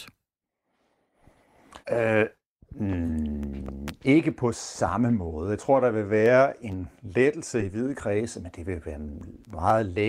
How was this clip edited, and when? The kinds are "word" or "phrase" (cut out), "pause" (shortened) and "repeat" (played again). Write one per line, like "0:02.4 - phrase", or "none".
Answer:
0:01.8 - pause